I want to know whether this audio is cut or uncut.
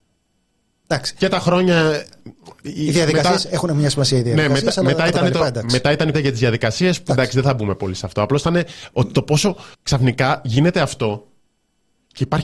cut